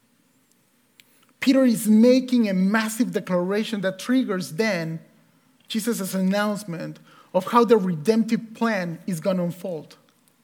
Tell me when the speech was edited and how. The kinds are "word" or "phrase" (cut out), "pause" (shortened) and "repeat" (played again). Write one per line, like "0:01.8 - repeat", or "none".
none